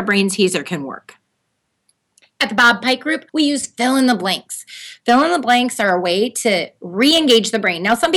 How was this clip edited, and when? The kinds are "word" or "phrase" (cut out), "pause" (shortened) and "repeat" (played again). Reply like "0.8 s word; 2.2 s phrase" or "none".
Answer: 3.3 s pause

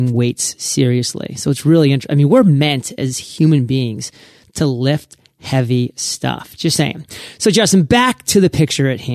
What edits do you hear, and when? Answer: none

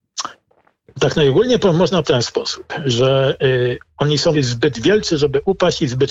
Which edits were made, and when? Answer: 2.0 s word; 4.3 s word

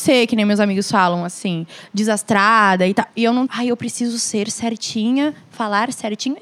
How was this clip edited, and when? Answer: 3.5 s phrase

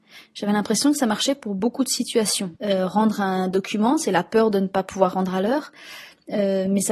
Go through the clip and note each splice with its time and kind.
2.6 s pause

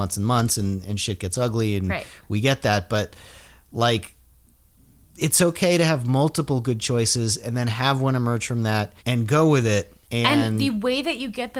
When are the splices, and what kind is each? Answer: 9.0 s pause; 10.0 s pause

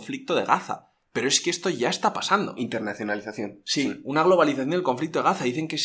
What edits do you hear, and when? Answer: none

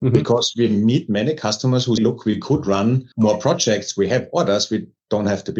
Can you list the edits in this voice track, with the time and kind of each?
2.0 s word; 3.1 s pause

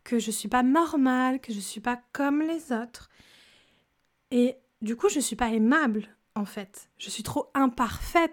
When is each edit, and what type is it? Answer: none

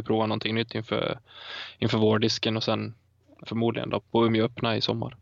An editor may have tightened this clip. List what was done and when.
3.4 s word; 4.0 s word

